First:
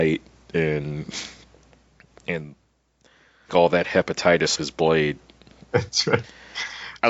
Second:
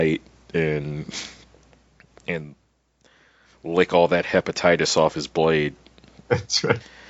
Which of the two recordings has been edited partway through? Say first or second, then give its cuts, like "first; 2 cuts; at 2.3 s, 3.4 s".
first; 2 cuts; at 3.5 s, 4.6 s